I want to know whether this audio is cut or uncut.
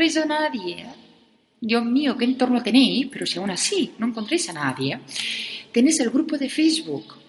uncut